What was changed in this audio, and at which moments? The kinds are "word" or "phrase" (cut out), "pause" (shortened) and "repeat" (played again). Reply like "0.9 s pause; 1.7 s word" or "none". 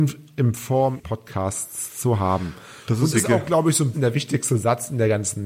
1.0 s word; 3.1 s word; 3.9 s word